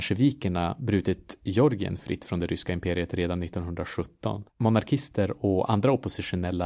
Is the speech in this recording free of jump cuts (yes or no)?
no